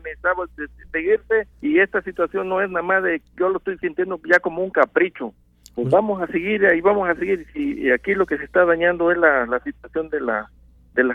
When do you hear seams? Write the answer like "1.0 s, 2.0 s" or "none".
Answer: 1.5 s, 5.4 s